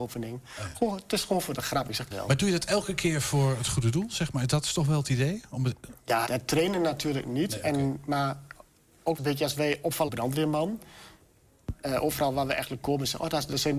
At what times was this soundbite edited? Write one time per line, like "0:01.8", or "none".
0:02.1
0:06.3
0:09.2
0:10.1